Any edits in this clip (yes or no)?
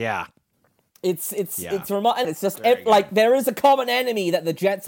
yes